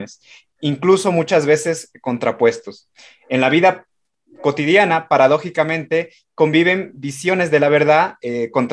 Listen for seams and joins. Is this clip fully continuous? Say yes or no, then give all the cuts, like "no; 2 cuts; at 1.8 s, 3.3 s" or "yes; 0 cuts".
yes; 0 cuts